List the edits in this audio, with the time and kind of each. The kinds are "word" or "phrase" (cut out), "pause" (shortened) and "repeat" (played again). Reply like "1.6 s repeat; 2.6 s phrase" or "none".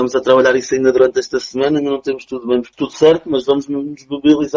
2.7 s word

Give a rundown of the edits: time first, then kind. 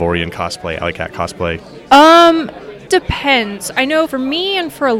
2.9 s phrase; 4.1 s word

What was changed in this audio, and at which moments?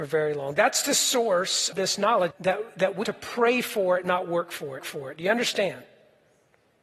1.7 s word; 2.3 s word; 3.0 s word; 4.8 s repeat

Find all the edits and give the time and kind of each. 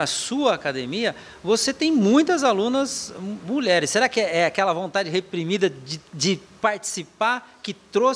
6.1 s pause

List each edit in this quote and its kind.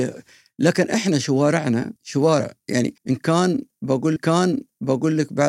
2.0 s pause; 3.0 s pause; 4.2 s repeat

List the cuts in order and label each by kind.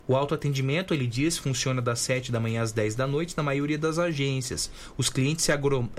none

